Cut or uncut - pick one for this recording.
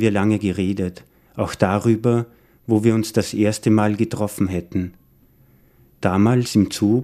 uncut